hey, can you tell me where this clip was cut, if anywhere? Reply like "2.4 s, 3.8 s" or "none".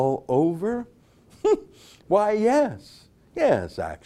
none

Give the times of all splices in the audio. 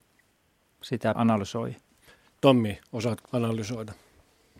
1.1 s, 3.2 s

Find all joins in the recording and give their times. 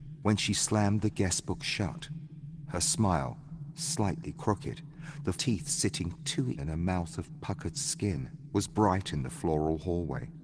5.3 s, 6.6 s

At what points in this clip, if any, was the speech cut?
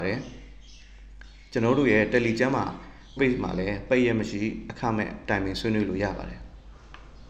3.2 s

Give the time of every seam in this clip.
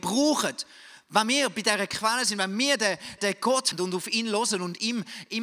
3.2 s, 3.7 s

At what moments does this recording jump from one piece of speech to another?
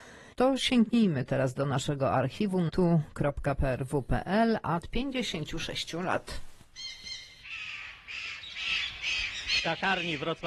2.7 s, 4.8 s

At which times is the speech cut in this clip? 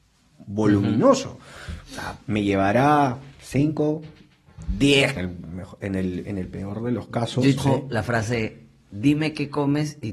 2.2 s, 3.3 s, 5.2 s, 7.6 s

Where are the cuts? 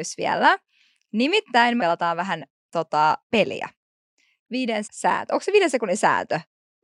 1.8 s, 3.2 s, 4.8 s

